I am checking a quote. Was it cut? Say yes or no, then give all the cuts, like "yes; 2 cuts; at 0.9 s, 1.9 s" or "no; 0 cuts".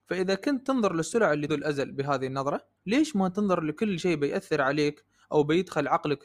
yes; 2 cuts; at 1.5 s, 2.8 s